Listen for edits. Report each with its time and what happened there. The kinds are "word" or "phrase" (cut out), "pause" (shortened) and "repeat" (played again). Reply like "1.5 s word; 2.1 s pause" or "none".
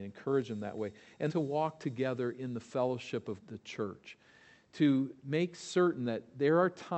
1.3 s word; 3.4 s phrase; 5.2 s pause